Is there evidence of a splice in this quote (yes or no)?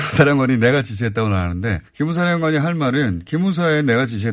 yes